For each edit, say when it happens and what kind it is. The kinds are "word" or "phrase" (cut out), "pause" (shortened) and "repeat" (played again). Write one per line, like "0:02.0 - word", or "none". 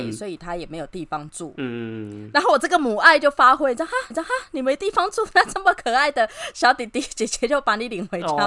0:04.1 - repeat

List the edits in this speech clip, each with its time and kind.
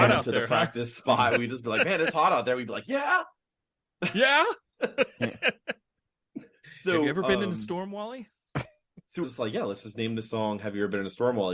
0:09.2 - phrase

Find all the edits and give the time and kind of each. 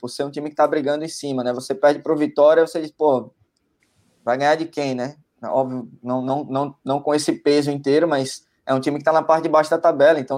none

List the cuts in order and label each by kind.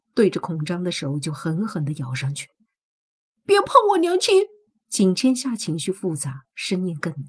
0:04.7 - pause

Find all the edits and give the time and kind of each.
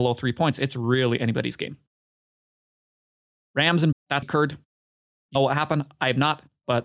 0:03.9 - word
0:04.2 - word
0:05.4 - phrase

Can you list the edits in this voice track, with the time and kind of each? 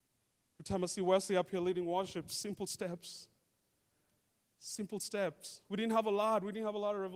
none

